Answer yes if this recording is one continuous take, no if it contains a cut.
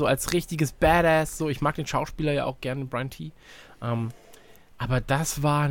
yes